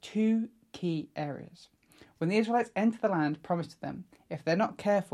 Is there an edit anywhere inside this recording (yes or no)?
no